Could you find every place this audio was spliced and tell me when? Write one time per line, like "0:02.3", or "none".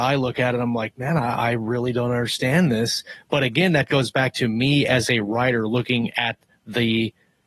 none